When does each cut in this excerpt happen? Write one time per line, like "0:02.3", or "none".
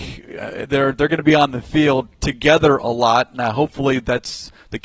none